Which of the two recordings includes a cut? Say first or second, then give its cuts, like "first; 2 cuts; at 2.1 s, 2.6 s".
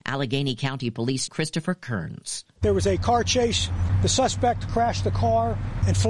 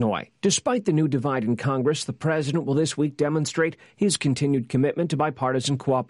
first; 1 cut; at 1.3 s